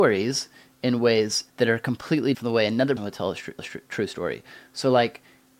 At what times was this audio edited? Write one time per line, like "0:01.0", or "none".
0:01.5
0:02.3
0:03.0
0:03.6